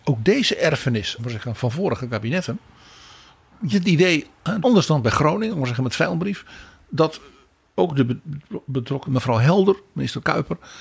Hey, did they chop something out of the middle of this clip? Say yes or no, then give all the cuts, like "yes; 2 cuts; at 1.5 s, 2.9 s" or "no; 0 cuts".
yes; 6 cuts; at 1.2 s, 1.6 s, 3.7 s, 4.6 s, 5.5 s, 9.1 s